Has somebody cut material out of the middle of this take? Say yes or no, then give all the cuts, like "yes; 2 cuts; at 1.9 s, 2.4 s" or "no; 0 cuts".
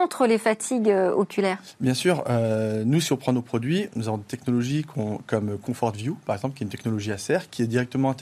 no; 0 cuts